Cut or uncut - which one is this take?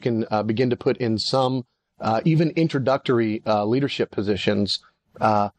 uncut